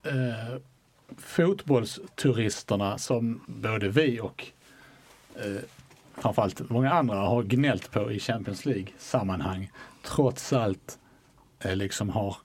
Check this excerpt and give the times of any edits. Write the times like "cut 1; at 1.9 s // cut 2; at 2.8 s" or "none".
cut 1; at 3.4 s